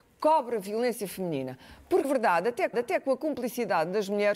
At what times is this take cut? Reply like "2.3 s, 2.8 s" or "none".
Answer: 2.0 s, 2.7 s